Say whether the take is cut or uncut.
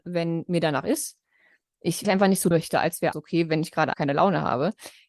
cut